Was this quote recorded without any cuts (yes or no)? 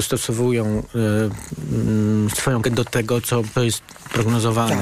no